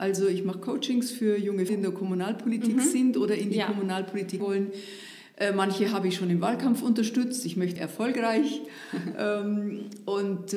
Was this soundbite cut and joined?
yes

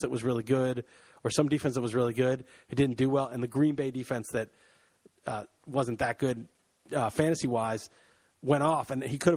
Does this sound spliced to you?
no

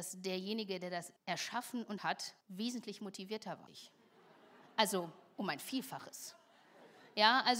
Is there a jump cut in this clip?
yes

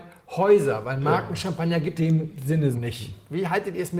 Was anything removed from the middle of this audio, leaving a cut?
yes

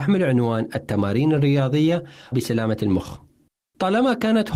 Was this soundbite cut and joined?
yes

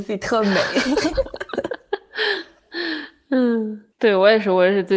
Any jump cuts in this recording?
yes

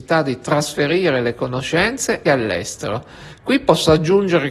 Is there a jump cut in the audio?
yes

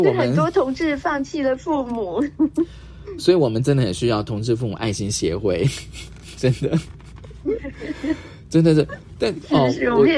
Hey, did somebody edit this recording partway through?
no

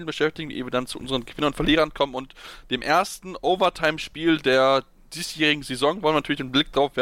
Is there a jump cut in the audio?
no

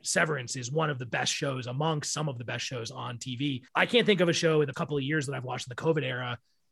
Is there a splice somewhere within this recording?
yes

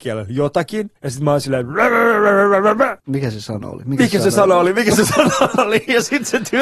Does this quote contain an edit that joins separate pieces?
yes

